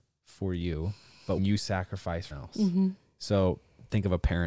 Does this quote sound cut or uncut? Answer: cut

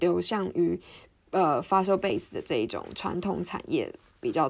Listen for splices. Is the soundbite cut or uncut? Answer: uncut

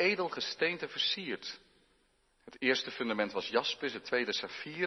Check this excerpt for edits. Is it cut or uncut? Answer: uncut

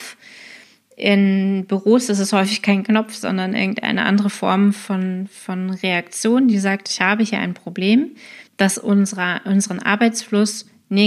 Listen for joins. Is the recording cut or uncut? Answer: cut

